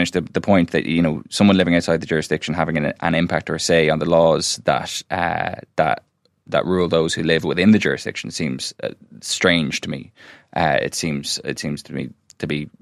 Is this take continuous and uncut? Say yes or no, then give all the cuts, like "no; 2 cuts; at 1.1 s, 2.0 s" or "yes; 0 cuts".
yes; 0 cuts